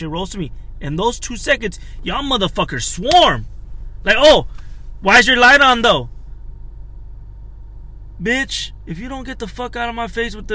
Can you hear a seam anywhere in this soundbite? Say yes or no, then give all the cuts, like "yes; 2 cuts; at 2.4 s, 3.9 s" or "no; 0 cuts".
no; 0 cuts